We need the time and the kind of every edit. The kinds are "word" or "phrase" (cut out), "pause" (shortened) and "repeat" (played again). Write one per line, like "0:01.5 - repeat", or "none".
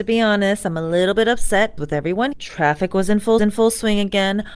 0:01.8 - word
0:02.3 - word
0:03.4 - repeat